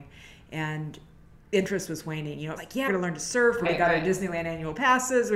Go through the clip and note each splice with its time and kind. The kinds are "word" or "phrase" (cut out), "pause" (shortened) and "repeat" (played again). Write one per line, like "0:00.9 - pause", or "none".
0:01.4 - pause
0:02.6 - phrase
0:02.9 - word
0:03.6 - word